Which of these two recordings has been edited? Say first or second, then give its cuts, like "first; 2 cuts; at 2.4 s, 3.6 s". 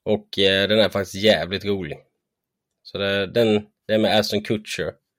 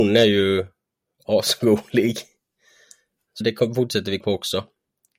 second; 2 cuts; at 3.4 s, 4.2 s